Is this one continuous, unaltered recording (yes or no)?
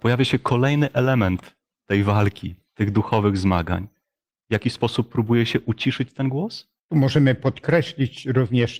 no